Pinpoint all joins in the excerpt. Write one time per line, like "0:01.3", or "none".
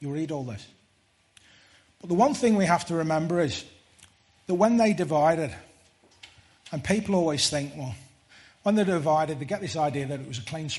none